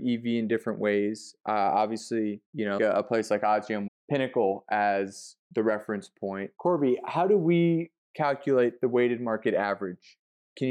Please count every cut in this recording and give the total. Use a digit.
5